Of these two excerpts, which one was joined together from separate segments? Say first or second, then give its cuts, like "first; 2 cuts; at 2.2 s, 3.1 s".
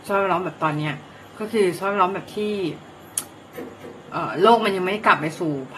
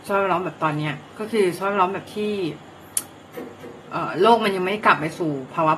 second; 1 cut; at 1.1 s